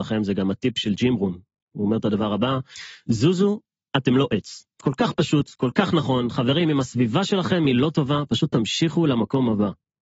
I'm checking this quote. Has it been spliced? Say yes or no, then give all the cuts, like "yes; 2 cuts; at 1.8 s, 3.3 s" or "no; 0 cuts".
no; 0 cuts